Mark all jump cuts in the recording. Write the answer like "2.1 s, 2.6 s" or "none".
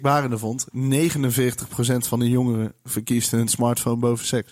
none